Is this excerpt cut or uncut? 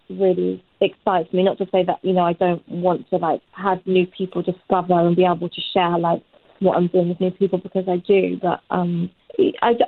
cut